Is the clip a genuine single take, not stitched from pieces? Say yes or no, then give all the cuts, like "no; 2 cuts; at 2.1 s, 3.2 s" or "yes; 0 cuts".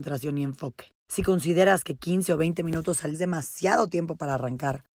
no; 2 cuts; at 1.0 s, 3.1 s